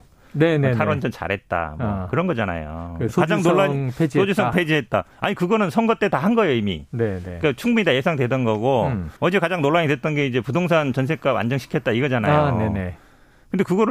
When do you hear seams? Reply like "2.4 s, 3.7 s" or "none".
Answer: 9.2 s